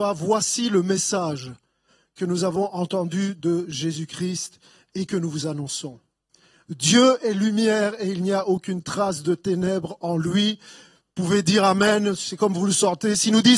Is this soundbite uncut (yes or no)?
yes